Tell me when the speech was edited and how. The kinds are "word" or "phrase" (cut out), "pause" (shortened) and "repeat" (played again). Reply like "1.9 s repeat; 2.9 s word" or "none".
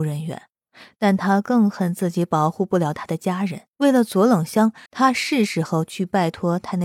3.7 s pause; 4.9 s pause